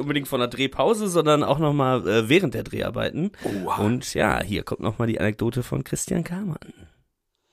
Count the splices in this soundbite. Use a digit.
0